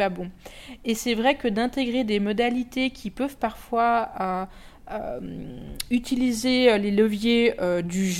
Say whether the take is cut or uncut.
uncut